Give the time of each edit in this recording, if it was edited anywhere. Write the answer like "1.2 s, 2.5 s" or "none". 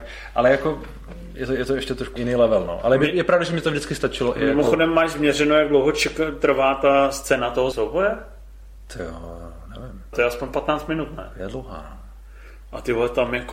2.2 s, 7.7 s, 10.1 s